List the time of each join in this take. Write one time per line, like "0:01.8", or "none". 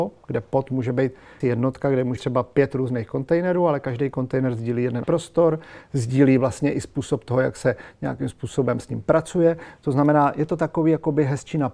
0:01.4
0:02.2
0:05.0